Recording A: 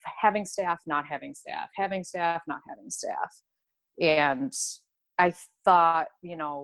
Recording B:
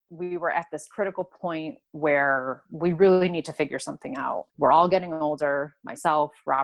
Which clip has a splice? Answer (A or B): B